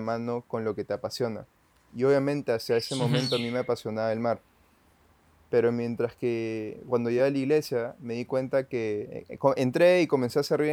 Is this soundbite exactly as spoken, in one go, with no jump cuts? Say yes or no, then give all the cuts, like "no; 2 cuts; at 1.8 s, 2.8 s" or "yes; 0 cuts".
yes; 0 cuts